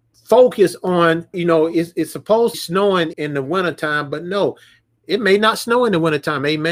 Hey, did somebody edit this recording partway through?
yes; 3 cuts; at 1.3 s, 2.5 s, 3.1 s

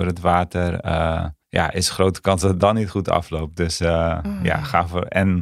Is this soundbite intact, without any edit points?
no; 1 cut; at 1.4 s

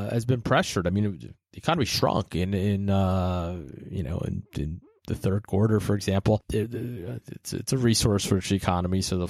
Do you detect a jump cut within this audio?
no; 0 cuts

